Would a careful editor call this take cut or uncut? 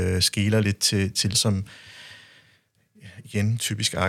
cut